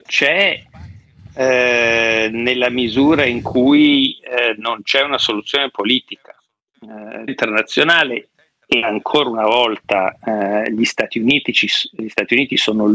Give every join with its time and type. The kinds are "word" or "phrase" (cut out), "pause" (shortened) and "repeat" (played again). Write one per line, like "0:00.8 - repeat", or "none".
0:07.3 - phrase